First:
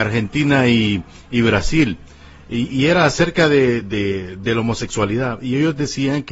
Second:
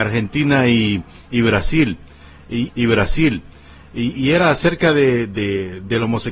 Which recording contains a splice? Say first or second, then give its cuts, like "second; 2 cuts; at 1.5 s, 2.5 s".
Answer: second; 1 cut; at 2.7 s